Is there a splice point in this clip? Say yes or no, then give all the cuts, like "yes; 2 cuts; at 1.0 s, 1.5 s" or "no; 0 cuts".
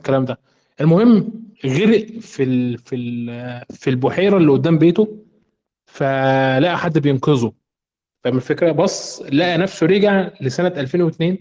yes; 1 cut; at 1.5 s